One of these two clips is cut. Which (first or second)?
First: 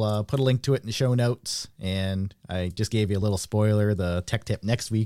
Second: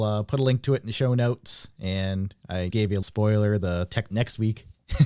second